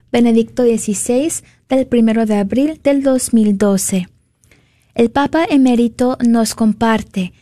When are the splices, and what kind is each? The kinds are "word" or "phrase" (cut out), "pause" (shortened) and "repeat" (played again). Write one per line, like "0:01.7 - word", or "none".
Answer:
none